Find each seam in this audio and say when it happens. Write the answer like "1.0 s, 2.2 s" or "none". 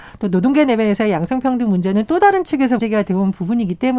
2.8 s